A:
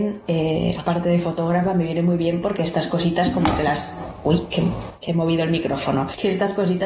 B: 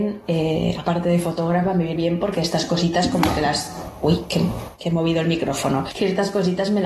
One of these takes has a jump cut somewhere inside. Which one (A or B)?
B